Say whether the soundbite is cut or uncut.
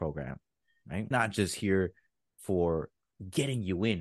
cut